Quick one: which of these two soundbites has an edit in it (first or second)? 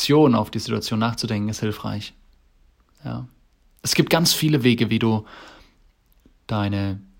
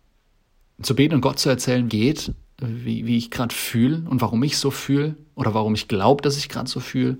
second